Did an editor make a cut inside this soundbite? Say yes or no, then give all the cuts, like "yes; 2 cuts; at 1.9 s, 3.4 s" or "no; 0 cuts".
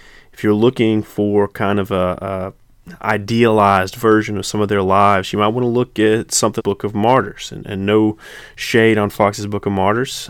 yes; 1 cut; at 6.6 s